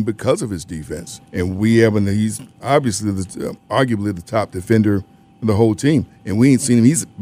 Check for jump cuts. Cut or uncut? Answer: cut